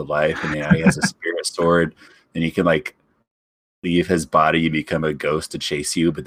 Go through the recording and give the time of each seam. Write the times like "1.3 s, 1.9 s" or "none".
none